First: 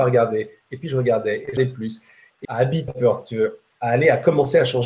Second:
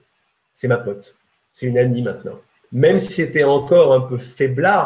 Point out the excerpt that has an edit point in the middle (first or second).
first